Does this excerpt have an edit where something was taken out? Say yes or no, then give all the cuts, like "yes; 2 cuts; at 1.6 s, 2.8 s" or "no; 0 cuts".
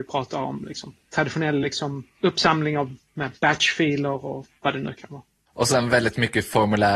no; 0 cuts